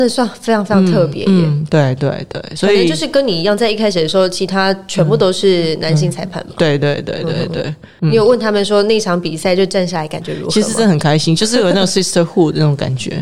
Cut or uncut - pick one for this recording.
uncut